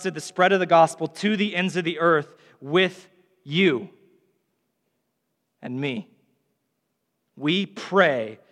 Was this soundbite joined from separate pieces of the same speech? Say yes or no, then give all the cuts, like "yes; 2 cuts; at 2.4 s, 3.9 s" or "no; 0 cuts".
no; 0 cuts